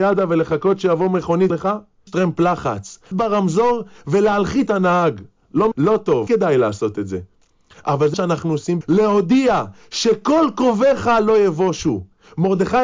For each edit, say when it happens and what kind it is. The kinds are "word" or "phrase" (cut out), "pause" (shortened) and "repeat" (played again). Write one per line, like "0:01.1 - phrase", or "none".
0:01.5 - word
0:02.1 - word
0:03.1 - word
0:04.7 - word
0:05.7 - word
0:06.3 - word
0:08.1 - word
0:08.8 - word

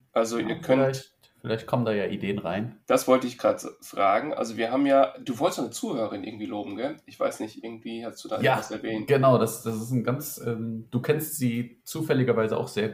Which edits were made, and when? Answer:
none

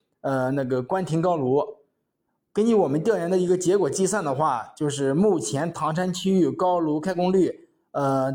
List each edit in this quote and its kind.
none

